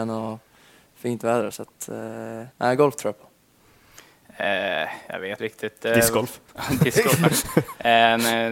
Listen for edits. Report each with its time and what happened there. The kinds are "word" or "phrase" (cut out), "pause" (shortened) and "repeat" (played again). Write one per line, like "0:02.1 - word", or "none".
0:01.5 - word
0:02.5 - pause
0:05.4 - word
0:06.5 - pause

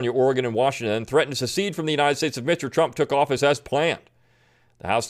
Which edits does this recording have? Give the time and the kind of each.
none

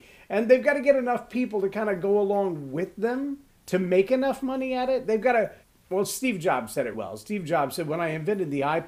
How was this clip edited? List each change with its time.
0:03.5 - pause
0:05.6 - pause
0:06.9 - word

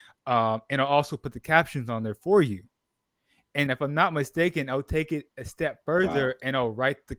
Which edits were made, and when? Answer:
0:03.7 - word

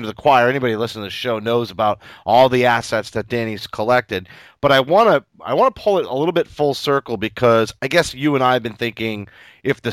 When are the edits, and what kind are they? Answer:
none

